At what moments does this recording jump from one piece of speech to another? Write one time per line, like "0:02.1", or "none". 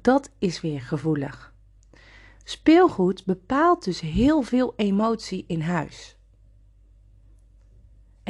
none

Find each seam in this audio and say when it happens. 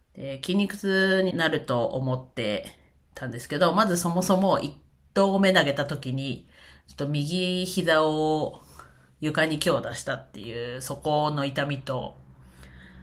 0:01.3

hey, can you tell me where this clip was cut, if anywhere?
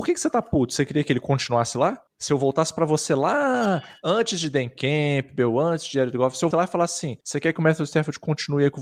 0:02.1
0:06.5
0:07.2

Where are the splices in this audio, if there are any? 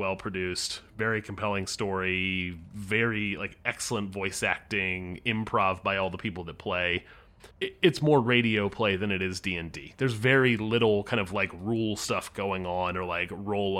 0:07.5

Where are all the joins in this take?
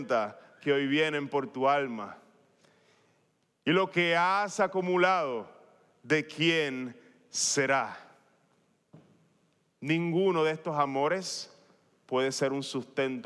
none

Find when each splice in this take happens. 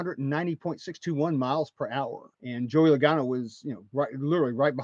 0:02.3

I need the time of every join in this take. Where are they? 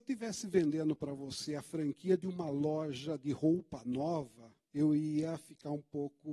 none

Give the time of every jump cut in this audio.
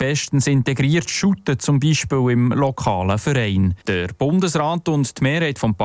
0:03.8

